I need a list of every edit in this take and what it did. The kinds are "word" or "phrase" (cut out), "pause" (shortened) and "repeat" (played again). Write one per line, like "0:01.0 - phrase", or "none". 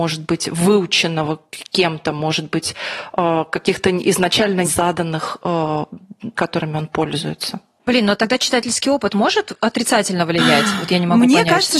0:04.6 - word
0:06.3 - word